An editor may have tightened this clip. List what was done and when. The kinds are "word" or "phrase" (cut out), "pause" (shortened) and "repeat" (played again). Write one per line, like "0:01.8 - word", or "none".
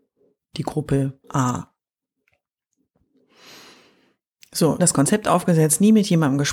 0:01.2 - pause
0:04.8 - word